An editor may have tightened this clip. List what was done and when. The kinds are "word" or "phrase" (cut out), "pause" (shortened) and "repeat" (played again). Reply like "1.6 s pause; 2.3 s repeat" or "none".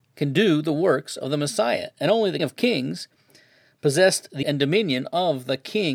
2.4 s word; 4.4 s word